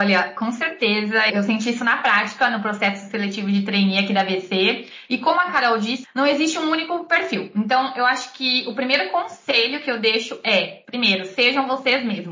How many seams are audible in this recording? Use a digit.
2